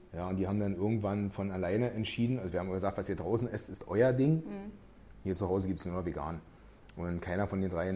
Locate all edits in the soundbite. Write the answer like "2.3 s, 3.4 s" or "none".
none